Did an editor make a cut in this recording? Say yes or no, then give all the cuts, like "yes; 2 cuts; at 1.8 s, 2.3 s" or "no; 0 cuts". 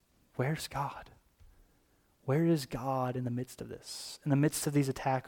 no; 0 cuts